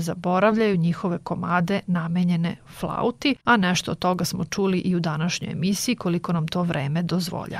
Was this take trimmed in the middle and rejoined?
yes; 1 cut; at 3.4 s

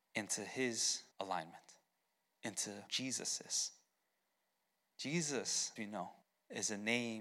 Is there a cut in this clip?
yes; 4 cuts; at 1.1 s, 2.9 s, 5.8 s, 6.2 s

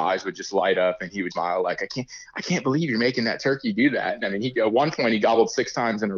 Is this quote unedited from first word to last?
no; 1 cut; at 1.3 s

